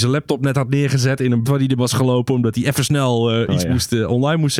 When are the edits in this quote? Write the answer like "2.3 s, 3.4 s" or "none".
1.4 s, 1.8 s